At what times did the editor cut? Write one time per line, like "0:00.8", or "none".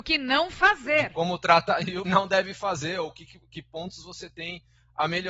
0:02.1